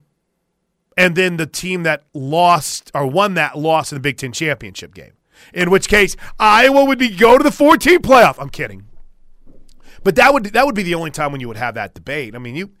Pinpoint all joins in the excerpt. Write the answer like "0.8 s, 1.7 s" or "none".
2.1 s